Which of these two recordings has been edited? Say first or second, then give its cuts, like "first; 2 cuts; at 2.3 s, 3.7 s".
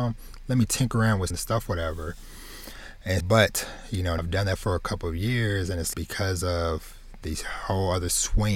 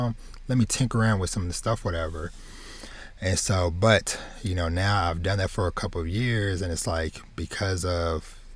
first; 4 cuts; at 1.3 s, 3.2 s, 4.2 s, 5.9 s